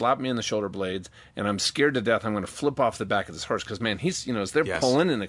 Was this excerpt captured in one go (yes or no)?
yes